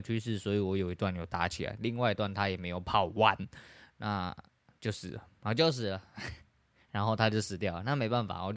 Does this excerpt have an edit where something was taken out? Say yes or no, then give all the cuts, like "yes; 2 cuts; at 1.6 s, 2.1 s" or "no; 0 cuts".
no; 0 cuts